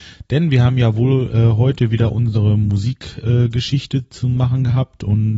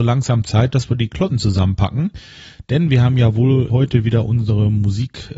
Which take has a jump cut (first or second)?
second